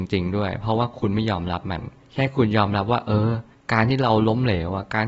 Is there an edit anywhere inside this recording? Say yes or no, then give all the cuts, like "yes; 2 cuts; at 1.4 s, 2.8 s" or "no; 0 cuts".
no; 0 cuts